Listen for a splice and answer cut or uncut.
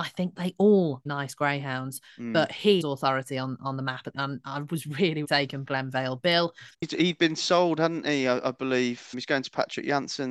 cut